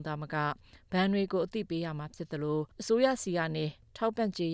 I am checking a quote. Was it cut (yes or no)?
yes